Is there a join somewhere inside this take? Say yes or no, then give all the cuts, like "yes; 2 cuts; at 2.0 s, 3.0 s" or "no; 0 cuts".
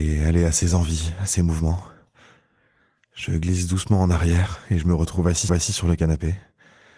yes; 1 cut; at 5.5 s